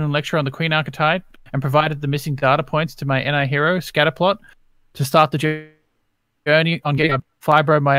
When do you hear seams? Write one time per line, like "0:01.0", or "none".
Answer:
none

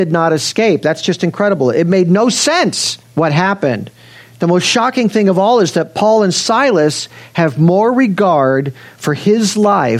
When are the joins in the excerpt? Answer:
0:03.0

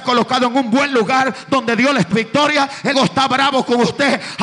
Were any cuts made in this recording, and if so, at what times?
0:02.1
0:02.9

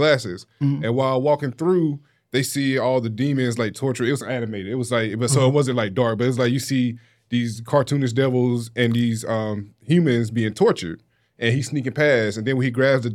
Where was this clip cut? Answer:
none

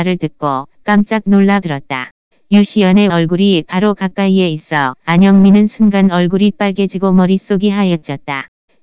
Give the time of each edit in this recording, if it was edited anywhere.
0:01.6
0:03.1

